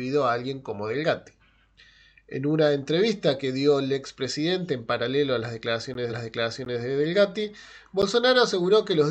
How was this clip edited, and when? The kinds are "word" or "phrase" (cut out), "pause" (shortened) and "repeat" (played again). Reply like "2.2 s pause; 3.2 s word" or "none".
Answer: 6.1 s repeat